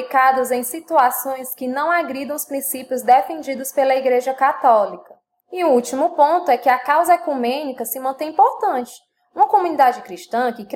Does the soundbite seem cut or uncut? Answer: cut